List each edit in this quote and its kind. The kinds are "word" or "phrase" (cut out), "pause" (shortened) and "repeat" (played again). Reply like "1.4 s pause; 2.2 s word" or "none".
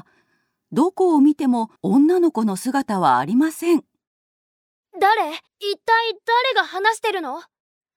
1.8 s pause; 5.5 s pause